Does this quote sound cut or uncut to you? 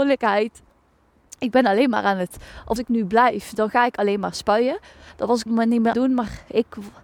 cut